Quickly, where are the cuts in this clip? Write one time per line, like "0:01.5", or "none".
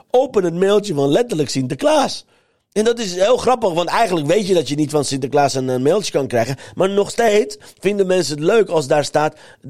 none